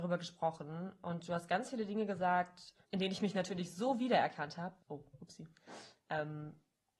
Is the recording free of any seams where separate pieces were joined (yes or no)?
no